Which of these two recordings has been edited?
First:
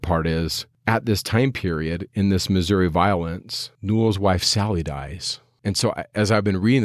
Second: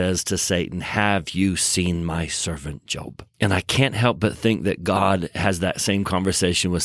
second; 1 cut; at 3.3 s

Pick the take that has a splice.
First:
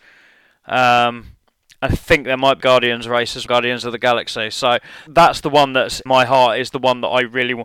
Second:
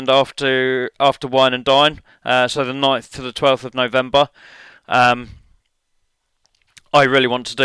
first; 4 cuts; at 2.6 s, 3.5 s, 5.1 s, 6.1 s

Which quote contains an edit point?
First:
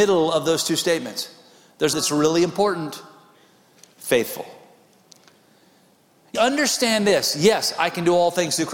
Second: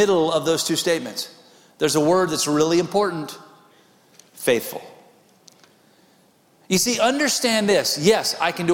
first; 2 cuts; at 1.9 s, 6.3 s

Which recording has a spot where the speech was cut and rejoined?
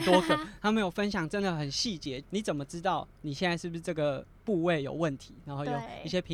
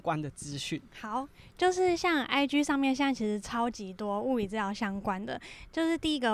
first; 1 cut; at 2.2 s

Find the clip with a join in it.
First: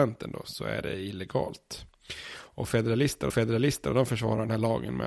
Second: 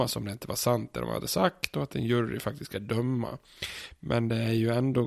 first; 1 cut; at 3.3 s

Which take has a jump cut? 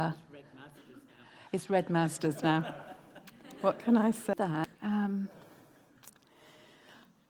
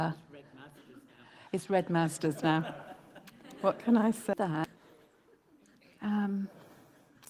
first; 1 cut; at 4.7 s

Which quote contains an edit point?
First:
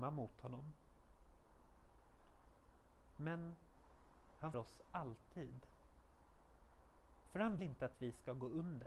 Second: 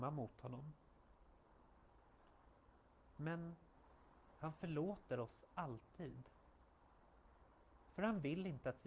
first; 2 cuts; at 4.5 s, 7.6 s

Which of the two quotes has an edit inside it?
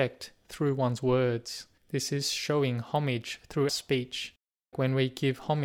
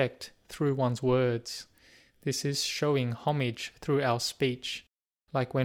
first; 3 cuts; at 1.8 s, 3.7 s, 4.7 s

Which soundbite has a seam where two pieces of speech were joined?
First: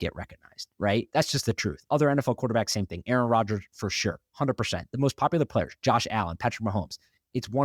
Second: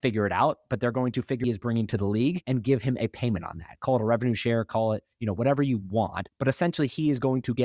second; 1 cut; at 1.4 s

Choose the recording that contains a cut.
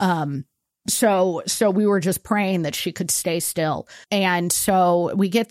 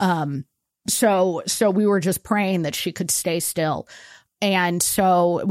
first; 1 cut; at 4.0 s

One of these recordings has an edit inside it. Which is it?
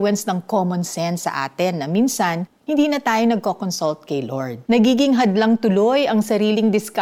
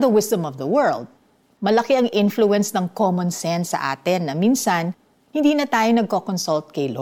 first; 2 cuts; at 2.6 s, 4.6 s

